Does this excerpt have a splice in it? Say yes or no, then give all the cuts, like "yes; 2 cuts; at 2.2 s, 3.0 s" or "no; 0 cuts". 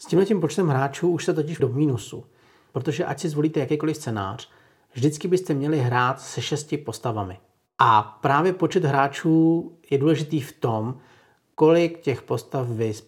yes; 1 cut; at 1.6 s